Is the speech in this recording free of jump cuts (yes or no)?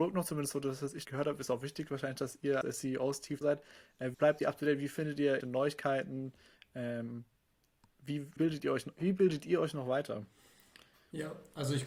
no